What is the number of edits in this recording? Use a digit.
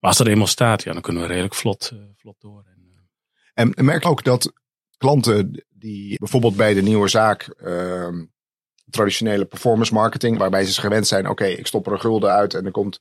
4